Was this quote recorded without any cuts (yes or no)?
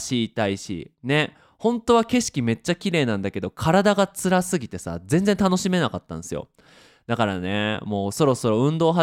yes